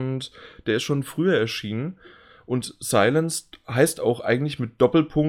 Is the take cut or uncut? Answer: uncut